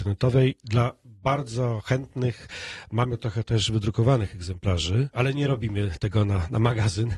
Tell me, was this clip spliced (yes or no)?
no